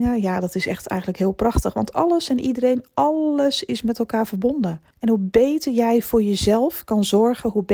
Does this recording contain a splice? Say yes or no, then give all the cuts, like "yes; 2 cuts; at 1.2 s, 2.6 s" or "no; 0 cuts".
yes; 1 cut; at 4.9 s